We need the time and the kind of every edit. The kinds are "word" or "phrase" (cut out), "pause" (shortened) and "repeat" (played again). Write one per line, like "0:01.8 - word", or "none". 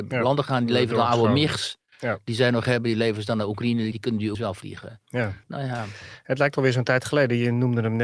0:04.3 - word
0:05.4 - pause